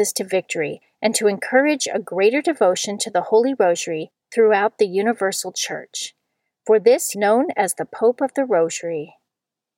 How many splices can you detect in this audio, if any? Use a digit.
1